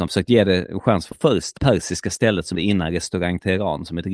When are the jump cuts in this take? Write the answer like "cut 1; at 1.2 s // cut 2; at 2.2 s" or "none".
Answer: cut 1; at 1.1 s // cut 2; at 1.6 s // cut 3; at 2.5 s